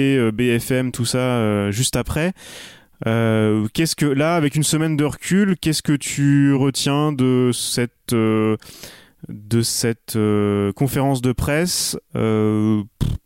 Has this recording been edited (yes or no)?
no